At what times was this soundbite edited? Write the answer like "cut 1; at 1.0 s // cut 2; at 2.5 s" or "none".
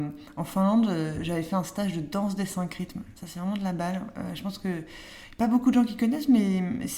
none